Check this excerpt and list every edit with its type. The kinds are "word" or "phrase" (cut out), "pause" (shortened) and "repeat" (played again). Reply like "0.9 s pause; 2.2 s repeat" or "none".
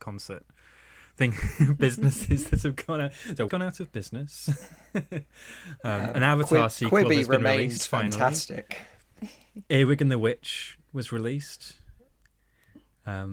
3.5 s word; 9.7 s pause